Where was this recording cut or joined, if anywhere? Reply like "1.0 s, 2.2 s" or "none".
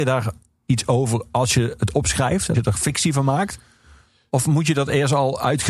2.5 s